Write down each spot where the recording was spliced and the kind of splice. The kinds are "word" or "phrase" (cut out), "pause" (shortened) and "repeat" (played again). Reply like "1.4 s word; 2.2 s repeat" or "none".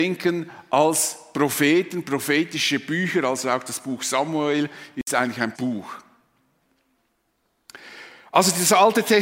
5.5 s word